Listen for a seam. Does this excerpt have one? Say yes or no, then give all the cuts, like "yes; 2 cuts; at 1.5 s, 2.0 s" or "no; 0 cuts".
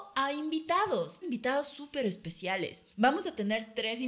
yes; 2 cuts; at 1.2 s, 2.9 s